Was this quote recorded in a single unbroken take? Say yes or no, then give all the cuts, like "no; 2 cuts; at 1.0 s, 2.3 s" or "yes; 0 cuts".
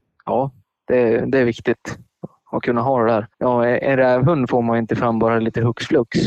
no; 1 cut; at 3.3 s